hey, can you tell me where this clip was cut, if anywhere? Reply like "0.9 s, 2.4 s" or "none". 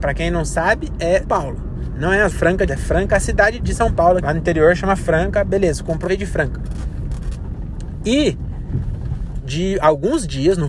1.2 s, 2.3 s, 2.7 s, 3.6 s, 4.2 s, 6.1 s, 9.4 s